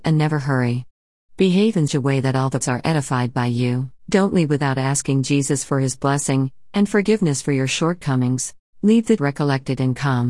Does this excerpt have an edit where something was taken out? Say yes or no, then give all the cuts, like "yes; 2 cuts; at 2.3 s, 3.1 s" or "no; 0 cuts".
yes; 5 cuts; at 1.9 s, 2.6 s, 4.0 s, 8.6 s, 9.2 s